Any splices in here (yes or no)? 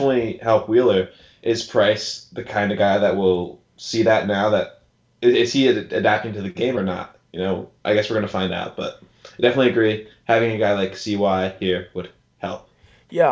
no